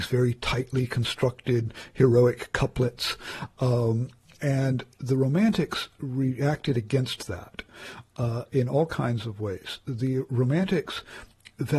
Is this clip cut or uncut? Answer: uncut